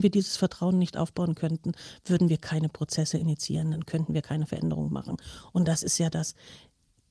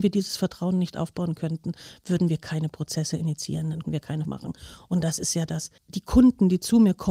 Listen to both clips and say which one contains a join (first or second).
second